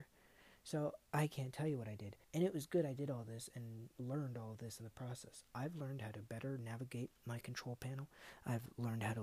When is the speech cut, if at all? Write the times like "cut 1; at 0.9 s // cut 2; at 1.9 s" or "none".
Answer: cut 1; at 2.2 s